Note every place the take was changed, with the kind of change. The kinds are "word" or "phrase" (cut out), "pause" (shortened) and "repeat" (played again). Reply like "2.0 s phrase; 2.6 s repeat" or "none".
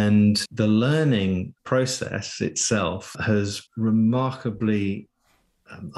1.6 s pause; 3.7 s word